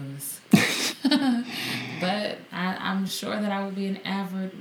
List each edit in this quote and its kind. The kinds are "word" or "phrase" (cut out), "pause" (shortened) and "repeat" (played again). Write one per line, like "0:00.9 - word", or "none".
none